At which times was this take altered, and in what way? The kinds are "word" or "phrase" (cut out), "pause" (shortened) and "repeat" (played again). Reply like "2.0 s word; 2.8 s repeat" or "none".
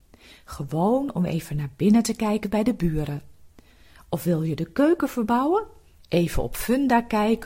none